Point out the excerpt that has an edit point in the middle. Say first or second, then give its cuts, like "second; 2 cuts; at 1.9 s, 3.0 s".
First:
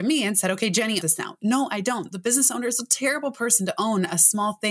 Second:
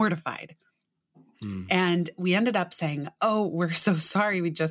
first; 1 cut; at 1.0 s